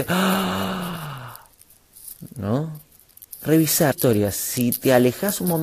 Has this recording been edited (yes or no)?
yes